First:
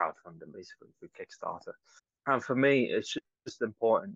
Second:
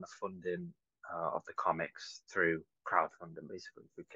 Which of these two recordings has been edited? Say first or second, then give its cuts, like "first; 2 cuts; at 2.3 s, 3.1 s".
first; 1 cut; at 2.0 s